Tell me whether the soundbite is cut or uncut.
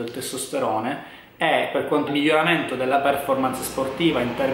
cut